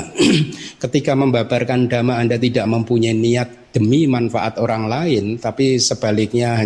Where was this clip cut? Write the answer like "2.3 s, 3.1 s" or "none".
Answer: none